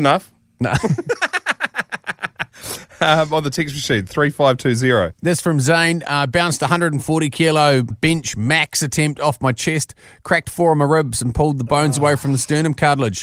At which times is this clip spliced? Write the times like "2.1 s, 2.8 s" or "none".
7.9 s